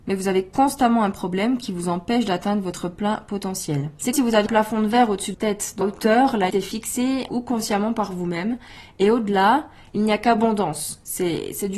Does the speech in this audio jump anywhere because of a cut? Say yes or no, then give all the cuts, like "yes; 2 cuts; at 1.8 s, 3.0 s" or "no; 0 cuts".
yes; 6 cuts; at 4.1 s, 4.5 s, 5.3 s, 5.8 s, 6.5 s, 7.3 s